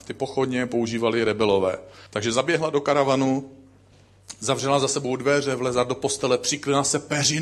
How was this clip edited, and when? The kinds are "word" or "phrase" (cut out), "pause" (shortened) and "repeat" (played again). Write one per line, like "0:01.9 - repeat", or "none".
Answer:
0:02.1 - pause